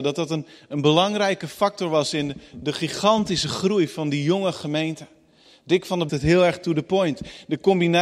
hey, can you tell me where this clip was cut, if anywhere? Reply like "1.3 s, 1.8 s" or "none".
6.1 s